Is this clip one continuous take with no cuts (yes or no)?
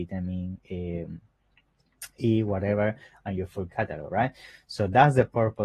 yes